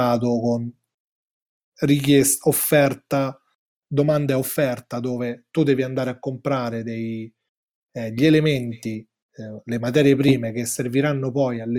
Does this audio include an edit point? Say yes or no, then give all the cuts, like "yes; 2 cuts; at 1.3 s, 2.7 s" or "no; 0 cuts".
no; 0 cuts